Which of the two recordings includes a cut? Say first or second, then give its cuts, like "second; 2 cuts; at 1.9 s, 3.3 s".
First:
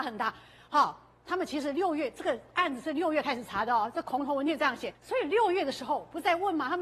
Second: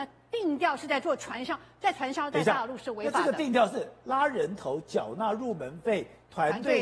first; 1 cut; at 4.9 s